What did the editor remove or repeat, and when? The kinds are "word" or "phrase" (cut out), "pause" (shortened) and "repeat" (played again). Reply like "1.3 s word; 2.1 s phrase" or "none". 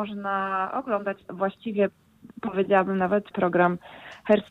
1.2 s word; 3.3 s word